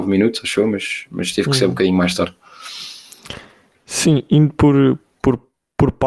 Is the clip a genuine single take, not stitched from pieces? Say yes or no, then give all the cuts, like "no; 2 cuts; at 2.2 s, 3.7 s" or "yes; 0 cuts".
yes; 0 cuts